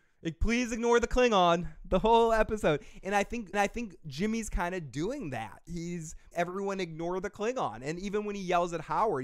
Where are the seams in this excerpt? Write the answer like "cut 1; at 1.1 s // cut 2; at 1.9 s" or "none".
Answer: cut 1; at 3.5 s // cut 2; at 6.3 s